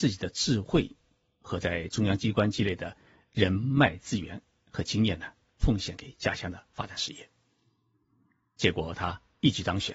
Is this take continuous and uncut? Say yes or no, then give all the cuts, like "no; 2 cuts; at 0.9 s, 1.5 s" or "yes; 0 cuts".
yes; 0 cuts